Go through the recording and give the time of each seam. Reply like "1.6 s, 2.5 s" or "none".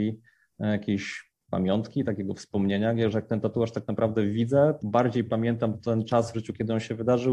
1.4 s, 4.8 s, 6.3 s